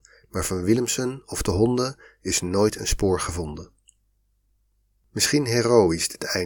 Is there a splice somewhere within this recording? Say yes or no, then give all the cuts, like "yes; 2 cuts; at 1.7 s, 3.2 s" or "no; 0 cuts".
no; 0 cuts